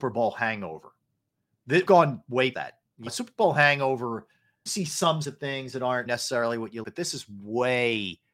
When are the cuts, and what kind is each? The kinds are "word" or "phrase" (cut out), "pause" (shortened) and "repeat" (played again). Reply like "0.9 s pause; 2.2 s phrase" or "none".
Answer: 1.9 s word; 2.5 s word; 3.1 s word; 4.7 s word; 5.2 s word; 6.1 s word; 6.8 s word